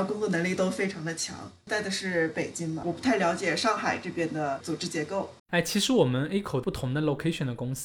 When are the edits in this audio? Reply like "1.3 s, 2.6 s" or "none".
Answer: 5.4 s